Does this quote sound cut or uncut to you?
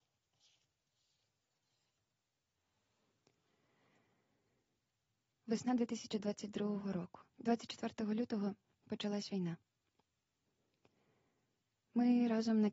cut